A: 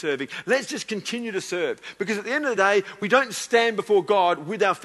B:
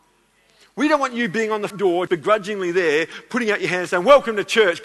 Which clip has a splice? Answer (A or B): B